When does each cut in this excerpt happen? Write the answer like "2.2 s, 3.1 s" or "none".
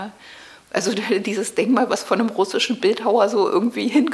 none